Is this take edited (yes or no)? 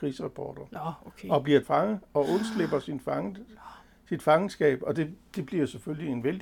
yes